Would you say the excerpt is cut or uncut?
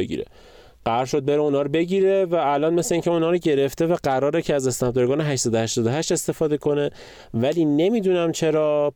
uncut